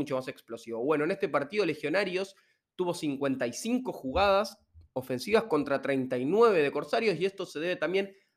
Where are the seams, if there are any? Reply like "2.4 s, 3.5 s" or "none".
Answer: none